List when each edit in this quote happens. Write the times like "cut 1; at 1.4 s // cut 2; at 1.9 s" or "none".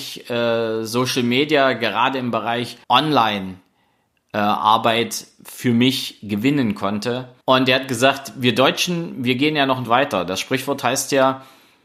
cut 1; at 2.8 s // cut 2; at 7.4 s // cut 3; at 9.9 s